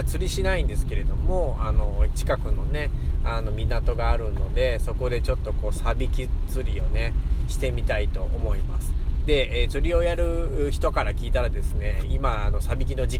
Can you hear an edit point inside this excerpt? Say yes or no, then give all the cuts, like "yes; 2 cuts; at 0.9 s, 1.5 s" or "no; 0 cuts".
no; 0 cuts